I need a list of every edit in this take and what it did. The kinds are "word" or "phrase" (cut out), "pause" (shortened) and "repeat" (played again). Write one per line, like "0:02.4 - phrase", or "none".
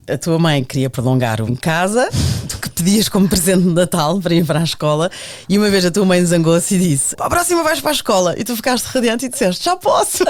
0:01.5 - word
0:02.6 - word
0:07.1 - word